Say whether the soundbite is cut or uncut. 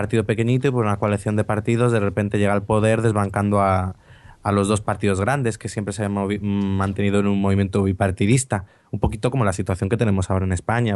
uncut